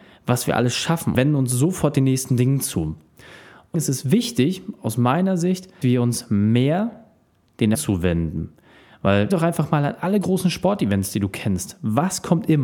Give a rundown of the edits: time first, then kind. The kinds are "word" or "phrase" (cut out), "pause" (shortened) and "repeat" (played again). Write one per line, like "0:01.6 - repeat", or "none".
0:01.1 - word
0:03.7 - word
0:05.8 - word
0:07.7 - word
0:09.3 - word